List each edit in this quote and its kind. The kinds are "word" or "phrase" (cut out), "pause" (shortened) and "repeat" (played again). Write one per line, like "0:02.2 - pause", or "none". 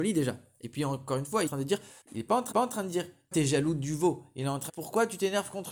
0:01.5 - phrase
0:02.0 - pause
0:02.5 - repeat
0:03.3 - word
0:04.7 - phrase